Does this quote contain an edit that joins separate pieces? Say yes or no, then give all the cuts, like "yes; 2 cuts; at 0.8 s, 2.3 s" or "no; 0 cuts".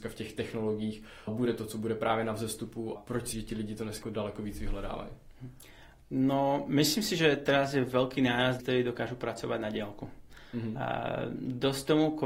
yes; 5 cuts; at 1.3 s, 3.0 s, 3.3 s, 4.0 s, 8.6 s